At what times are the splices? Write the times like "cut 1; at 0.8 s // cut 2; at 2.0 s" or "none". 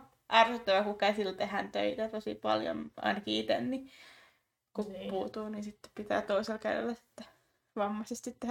none